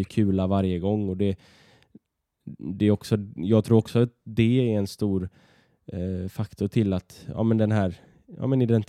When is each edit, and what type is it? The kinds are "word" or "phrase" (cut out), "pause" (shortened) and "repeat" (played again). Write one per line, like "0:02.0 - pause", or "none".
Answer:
none